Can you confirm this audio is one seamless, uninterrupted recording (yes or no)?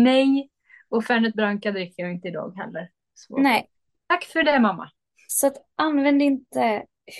yes